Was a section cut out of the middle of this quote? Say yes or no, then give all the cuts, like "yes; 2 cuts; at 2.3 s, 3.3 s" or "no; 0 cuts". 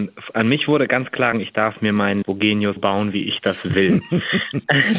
yes; 3 cuts; at 1.3 s, 2.2 s, 2.8 s